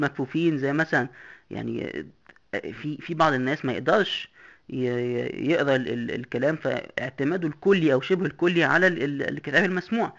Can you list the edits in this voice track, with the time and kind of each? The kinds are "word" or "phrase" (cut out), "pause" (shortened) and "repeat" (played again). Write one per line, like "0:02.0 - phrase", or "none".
none